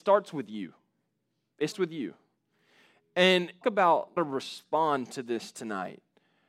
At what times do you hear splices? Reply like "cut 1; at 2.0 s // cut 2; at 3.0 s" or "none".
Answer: cut 1; at 1.7 s // cut 2; at 3.6 s // cut 3; at 4.2 s